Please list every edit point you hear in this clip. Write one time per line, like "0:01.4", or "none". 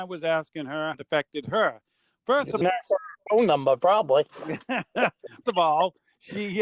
0:00.9
0:02.6
0:05.4